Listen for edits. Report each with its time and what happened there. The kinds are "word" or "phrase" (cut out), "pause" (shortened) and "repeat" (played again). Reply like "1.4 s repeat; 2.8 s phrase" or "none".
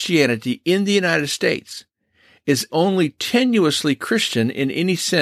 2.7 s word